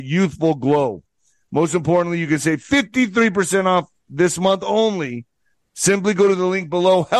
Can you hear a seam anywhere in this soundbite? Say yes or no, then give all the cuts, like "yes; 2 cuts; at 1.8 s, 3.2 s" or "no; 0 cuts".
no; 0 cuts